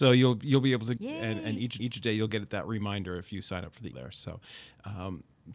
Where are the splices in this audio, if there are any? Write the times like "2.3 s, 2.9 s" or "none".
1.0 s, 1.8 s, 3.9 s

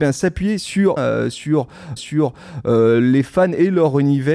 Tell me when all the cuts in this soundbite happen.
1.0 s, 2.0 s

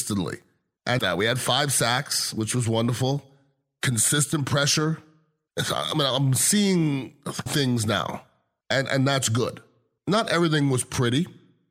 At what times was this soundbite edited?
1.0 s, 7.5 s

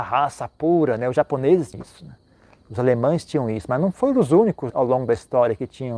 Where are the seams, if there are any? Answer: 1.7 s, 4.7 s

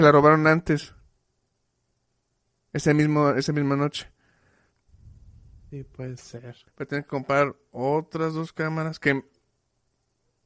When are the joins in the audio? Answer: 6.7 s

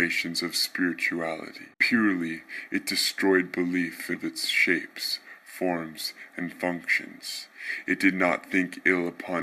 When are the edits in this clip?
1.7 s, 4.2 s

